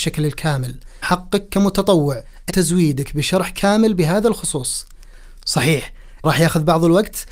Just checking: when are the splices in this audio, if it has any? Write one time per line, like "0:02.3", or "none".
0:01.0
0:02.5
0:06.2